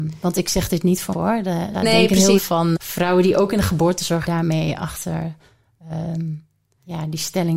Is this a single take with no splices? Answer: no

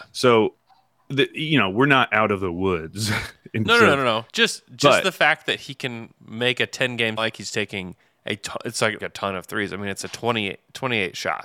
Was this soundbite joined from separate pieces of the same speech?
yes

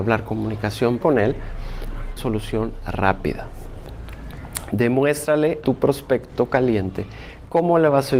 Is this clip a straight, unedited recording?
no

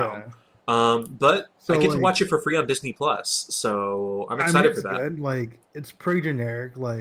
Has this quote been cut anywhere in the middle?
no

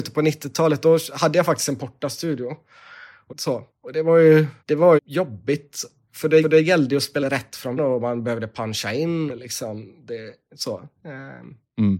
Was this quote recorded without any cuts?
no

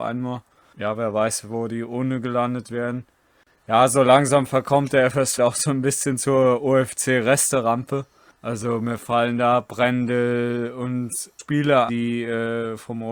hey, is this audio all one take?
no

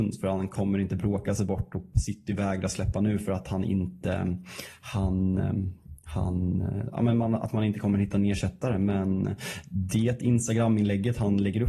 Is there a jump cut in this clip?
no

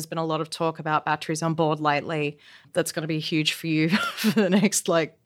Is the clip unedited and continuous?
yes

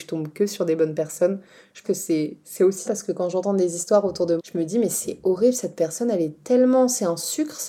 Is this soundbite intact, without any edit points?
no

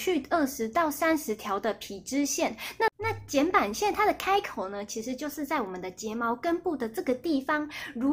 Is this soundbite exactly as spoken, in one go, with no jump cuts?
no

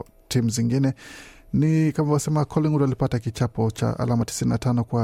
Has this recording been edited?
no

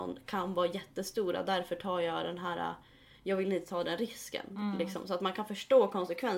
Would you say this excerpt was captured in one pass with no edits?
yes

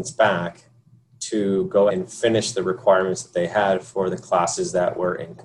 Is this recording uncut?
no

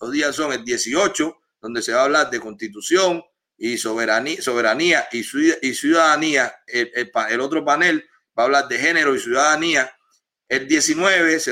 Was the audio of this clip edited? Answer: no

